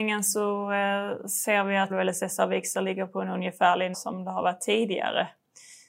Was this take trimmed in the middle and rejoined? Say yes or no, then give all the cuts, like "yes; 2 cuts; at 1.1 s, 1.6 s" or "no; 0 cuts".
yes; 2 cuts; at 1.9 s, 3.9 s